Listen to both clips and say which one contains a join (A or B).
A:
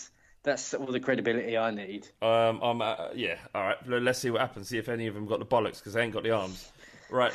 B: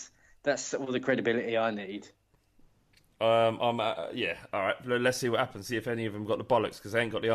A